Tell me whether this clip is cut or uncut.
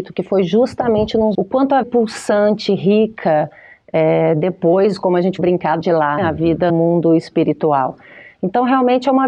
cut